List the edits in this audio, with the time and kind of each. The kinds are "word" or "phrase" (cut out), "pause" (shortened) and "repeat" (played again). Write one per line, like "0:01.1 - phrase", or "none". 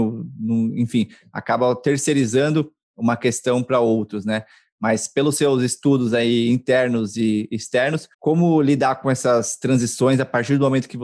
0:08.1 - pause